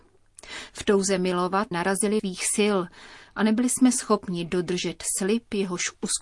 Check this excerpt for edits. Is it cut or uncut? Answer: cut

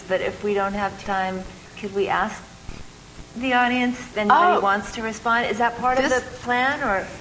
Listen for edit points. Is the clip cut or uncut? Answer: cut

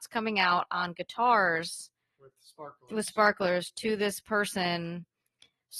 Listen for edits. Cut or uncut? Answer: uncut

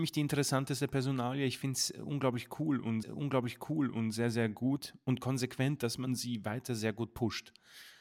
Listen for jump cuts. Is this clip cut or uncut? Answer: cut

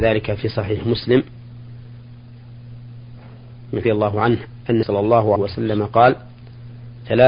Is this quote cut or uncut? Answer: cut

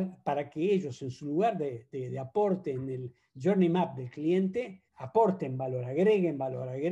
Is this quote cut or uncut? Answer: cut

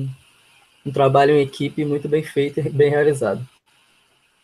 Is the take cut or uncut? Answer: uncut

